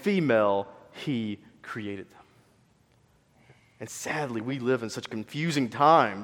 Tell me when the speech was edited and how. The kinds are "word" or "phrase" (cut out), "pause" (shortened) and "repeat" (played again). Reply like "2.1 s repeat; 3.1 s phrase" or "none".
none